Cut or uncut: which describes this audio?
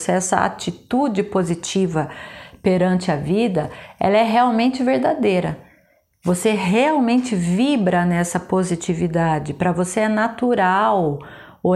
uncut